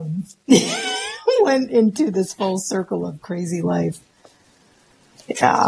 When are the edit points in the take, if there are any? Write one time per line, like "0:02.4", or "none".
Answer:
none